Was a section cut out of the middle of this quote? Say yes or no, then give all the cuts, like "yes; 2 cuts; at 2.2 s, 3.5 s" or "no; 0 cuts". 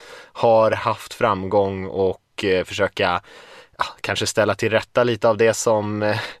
no; 0 cuts